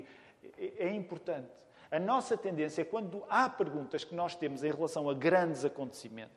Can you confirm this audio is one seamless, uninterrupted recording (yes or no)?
yes